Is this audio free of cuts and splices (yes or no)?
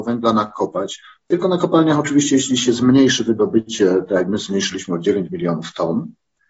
yes